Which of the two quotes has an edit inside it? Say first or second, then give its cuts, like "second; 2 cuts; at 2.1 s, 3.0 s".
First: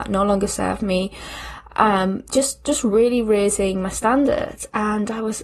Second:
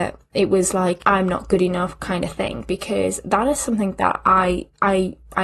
second; 1 cut; at 1.0 s